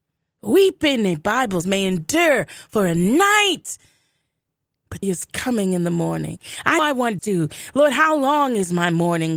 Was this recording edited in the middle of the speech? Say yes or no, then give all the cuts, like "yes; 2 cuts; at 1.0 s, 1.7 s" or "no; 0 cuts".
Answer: yes; 4 cuts; at 1.6 s, 5.0 s, 6.8 s, 7.2 s